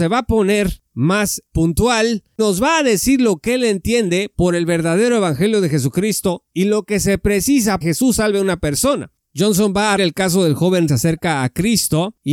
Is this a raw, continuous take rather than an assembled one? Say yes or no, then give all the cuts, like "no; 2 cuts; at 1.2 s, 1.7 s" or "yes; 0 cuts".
no; 4 cuts; at 2.4 s, 7.8 s, 10.0 s, 10.9 s